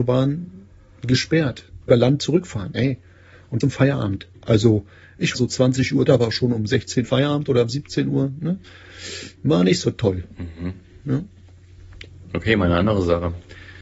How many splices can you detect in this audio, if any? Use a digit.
6